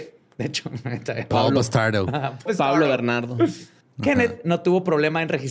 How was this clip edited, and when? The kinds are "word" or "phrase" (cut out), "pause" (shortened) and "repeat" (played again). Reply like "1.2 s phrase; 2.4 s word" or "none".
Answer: 2.5 s word; 3.8 s pause